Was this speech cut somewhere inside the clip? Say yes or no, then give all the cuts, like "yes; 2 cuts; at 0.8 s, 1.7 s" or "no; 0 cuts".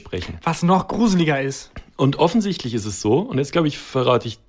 no; 0 cuts